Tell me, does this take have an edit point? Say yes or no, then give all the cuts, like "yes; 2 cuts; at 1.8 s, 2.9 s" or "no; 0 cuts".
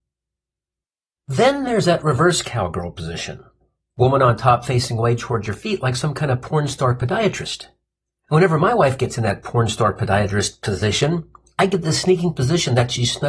no; 0 cuts